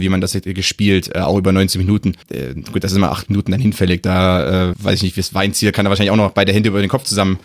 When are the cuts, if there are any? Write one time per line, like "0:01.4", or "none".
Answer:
0:02.2
0:04.7

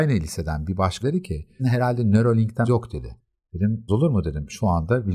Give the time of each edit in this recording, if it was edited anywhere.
0:01.0
0:01.6
0:02.6
0:03.9

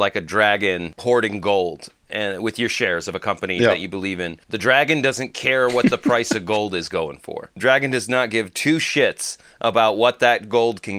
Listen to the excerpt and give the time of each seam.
0:01.0
0:04.4

